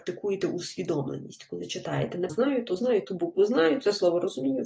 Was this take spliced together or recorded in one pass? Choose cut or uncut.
cut